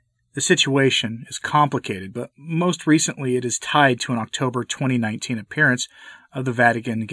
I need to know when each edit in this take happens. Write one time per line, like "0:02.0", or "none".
none